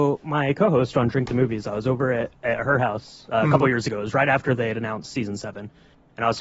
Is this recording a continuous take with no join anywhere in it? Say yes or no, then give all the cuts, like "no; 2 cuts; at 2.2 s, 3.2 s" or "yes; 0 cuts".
yes; 0 cuts